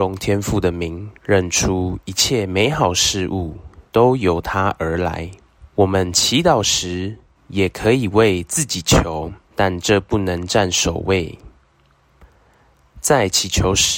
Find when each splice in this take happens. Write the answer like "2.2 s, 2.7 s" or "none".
1.2 s, 3.9 s, 5.7 s, 7.3 s, 9.4 s